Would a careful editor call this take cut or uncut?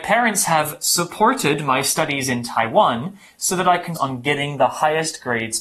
cut